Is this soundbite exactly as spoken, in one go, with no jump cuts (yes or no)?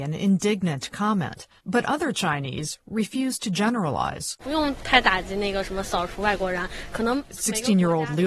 no